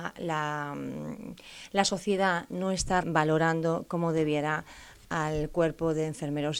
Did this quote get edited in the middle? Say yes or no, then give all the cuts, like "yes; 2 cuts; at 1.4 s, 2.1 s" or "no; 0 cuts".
yes; 1 cut; at 3.0 s